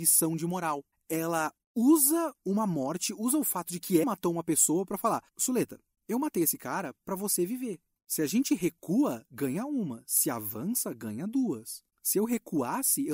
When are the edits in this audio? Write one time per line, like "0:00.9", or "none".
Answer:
0:04.0
0:05.3